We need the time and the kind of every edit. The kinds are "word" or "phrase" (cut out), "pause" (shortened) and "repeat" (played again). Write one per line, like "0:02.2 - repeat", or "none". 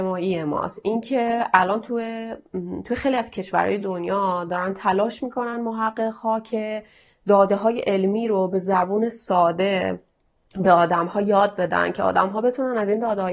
none